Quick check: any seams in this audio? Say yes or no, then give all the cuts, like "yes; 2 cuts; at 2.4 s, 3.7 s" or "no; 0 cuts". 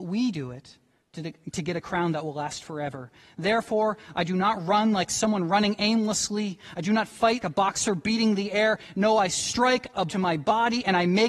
yes; 2 cuts; at 7.4 s, 10.1 s